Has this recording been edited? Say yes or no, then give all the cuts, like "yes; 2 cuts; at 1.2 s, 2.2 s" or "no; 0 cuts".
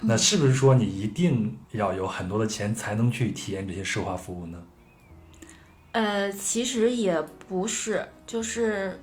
yes; 1 cut; at 1.6 s